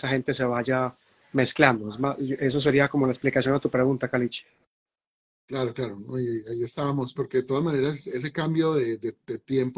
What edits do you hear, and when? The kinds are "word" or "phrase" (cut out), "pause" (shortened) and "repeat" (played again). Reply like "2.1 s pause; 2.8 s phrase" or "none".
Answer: 7.2 s phrase